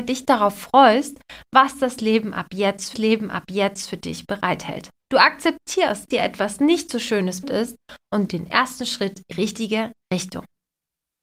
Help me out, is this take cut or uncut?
cut